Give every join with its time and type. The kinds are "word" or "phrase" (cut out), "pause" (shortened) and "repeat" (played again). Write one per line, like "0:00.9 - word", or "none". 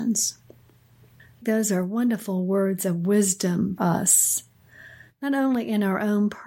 0:01.4 - word
0:03.8 - word